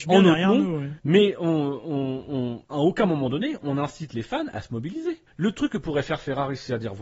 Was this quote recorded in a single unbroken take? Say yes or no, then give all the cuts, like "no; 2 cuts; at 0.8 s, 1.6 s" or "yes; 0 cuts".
yes; 0 cuts